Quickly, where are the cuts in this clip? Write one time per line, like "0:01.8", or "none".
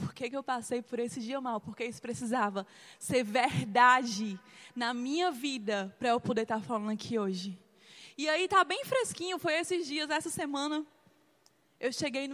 none